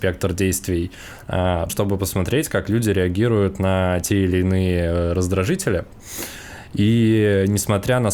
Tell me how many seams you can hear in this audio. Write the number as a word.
one